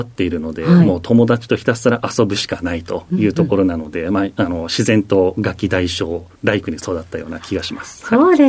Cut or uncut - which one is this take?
cut